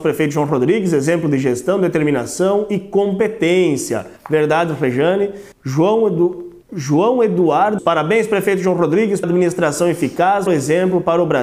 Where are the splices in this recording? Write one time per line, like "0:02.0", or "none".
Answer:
0:04.2
0:05.5
0:06.6
0:07.8
0:09.2
0:10.5